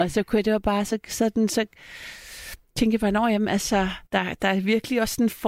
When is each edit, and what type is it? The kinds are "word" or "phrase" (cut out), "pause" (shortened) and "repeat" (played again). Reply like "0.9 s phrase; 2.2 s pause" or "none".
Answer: 4.1 s pause